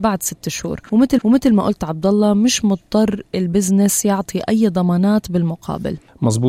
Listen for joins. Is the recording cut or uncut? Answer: cut